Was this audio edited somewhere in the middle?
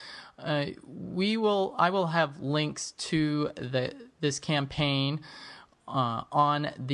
no; 0 cuts

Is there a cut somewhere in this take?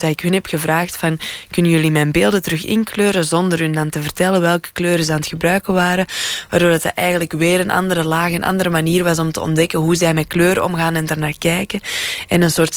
no; 0 cuts

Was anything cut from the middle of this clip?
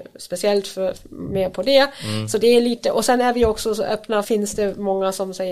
yes; 1 cut; at 4.2 s

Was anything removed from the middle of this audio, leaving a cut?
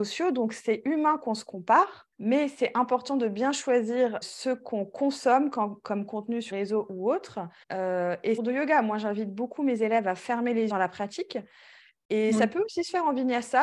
yes; 6 cuts; at 2.1 s, 4.2 s, 6.5 s, 7.6 s, 8.4 s, 10.7 s

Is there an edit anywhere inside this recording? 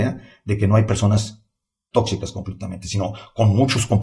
no; 0 cuts

